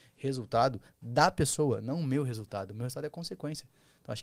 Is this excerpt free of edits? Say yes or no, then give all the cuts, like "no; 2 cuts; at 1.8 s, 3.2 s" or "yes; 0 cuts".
yes; 0 cuts